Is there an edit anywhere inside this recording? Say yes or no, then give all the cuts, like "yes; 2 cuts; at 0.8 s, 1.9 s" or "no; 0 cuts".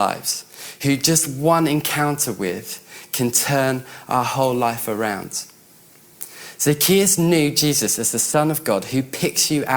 no; 0 cuts